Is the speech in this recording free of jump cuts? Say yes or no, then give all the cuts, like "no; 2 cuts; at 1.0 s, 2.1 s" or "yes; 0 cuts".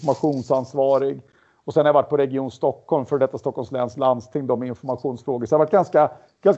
yes; 0 cuts